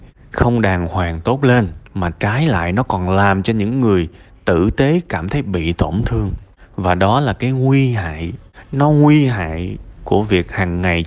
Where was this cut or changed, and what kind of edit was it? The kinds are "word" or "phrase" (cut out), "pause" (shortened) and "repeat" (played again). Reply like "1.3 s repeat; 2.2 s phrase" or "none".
1.9 s pause